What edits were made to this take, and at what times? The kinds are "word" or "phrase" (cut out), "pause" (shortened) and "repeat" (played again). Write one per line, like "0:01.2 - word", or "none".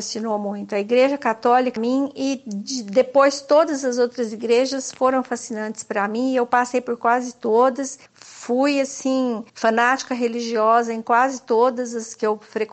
0:01.8 - phrase
0:08.1 - pause
0:09.5 - pause